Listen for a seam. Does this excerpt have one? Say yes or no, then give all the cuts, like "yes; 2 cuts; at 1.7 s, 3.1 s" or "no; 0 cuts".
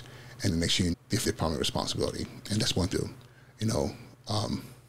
yes; 4 cuts; at 0.9 s, 1.2 s, 2.9 s, 3.4 s